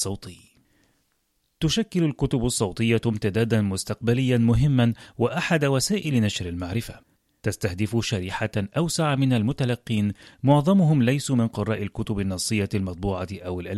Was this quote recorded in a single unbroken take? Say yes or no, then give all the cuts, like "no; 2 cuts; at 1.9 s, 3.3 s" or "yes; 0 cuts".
yes; 0 cuts